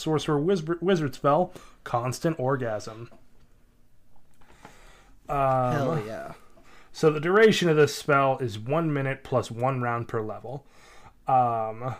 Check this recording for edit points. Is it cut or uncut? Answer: uncut